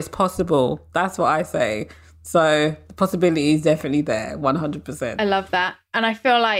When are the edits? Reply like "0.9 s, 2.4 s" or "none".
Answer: none

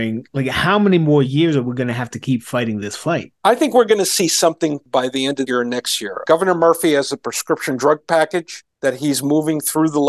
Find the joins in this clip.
3.4 s, 5.5 s, 8.7 s

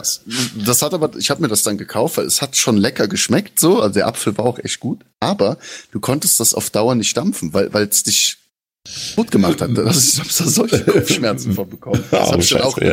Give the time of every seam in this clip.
none

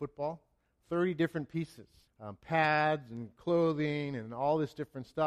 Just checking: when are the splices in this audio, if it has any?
2.1 s

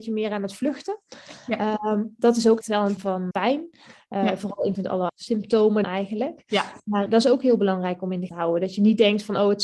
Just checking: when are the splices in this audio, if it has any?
2.6 s, 3.0 s, 3.3 s, 4.7 s, 5.1 s, 5.8 s, 7.1 s, 8.3 s

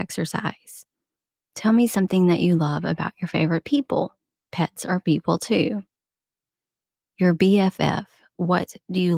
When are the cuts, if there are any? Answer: none

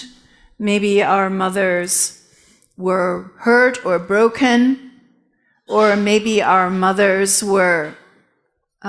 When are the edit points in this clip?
none

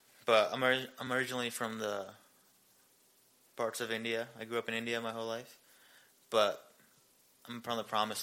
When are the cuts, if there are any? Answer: none

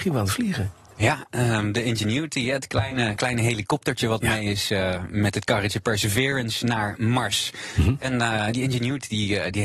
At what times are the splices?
none

